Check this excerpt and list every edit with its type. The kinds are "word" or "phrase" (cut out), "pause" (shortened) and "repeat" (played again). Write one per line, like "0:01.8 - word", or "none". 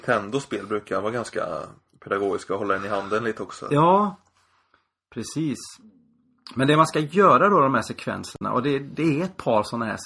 none